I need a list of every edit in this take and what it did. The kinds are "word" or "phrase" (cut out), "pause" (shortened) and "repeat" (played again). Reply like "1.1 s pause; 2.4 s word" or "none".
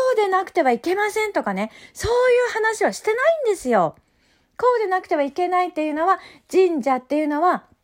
none